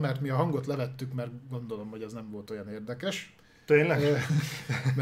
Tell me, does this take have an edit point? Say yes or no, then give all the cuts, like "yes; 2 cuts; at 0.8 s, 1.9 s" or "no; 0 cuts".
no; 0 cuts